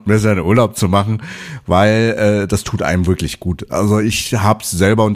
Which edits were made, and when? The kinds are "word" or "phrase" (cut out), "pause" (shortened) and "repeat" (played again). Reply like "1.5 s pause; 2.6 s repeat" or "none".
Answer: none